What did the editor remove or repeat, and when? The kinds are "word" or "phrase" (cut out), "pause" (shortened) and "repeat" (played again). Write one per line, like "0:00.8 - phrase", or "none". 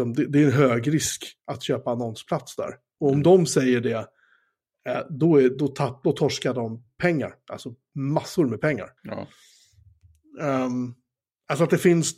0:09.0 - pause